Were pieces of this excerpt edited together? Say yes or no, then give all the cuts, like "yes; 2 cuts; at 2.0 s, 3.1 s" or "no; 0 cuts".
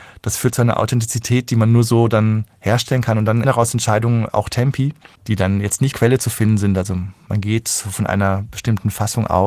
yes; 3 cuts; at 3.4 s, 5.2 s, 5.9 s